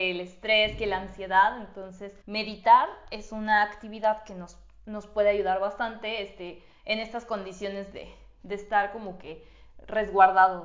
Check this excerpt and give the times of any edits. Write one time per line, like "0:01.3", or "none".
0:02.2